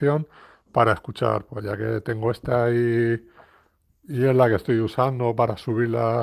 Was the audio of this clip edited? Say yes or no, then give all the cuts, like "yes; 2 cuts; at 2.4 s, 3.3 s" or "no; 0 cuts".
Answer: yes; 1 cut; at 1.5 s